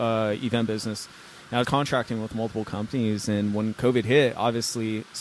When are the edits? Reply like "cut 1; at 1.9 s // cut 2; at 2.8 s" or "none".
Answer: cut 1; at 1.6 s

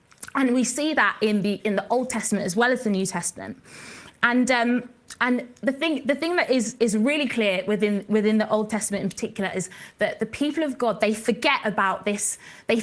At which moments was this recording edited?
none

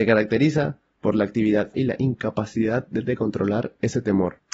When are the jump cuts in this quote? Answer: cut 1; at 1.7 s

